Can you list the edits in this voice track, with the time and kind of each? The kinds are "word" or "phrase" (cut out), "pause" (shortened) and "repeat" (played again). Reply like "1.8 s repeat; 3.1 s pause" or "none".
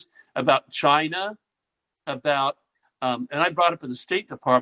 none